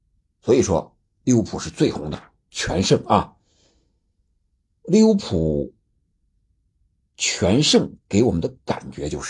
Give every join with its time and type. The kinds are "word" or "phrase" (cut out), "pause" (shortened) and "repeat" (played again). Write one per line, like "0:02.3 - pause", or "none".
none